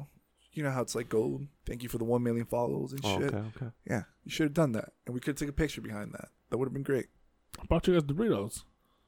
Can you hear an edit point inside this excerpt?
yes; 2 cuts; at 1.6 s, 6.4 s

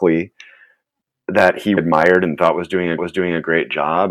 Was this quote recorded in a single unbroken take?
no; 2 cuts; at 1.8 s, 3.0 s

